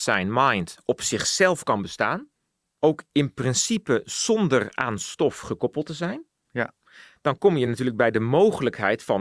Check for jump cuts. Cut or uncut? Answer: uncut